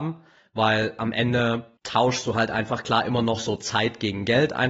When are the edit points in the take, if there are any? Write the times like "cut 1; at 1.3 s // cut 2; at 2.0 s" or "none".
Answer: cut 1; at 1.8 s